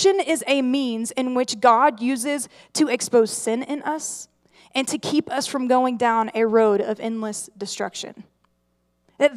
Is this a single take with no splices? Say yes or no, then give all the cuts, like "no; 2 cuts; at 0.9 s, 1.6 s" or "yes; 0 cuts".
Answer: yes; 0 cuts